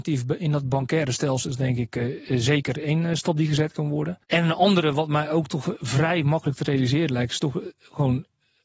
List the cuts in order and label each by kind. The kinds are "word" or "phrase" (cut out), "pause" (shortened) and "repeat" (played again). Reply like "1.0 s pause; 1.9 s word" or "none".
4.2 s pause

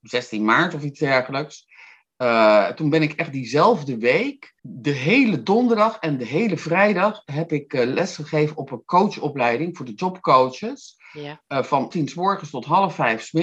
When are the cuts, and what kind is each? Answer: 4.6 s pause; 11.9 s word

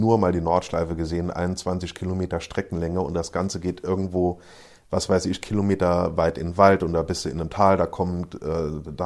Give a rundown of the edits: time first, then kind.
none

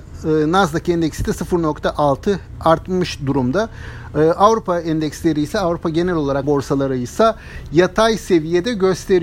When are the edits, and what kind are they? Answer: 6.4 s word

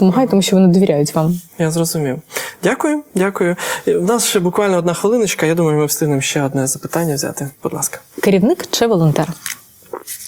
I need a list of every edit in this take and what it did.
1.5 s pause; 7.5 s pause

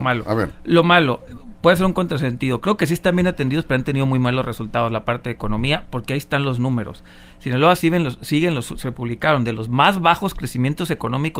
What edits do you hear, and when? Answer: none

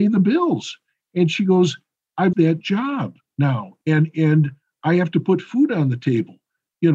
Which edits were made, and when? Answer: 2.3 s word

